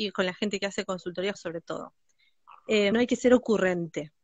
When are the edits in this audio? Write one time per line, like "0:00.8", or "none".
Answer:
0:01.3
0:02.9